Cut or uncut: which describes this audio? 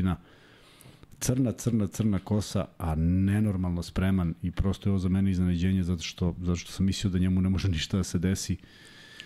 uncut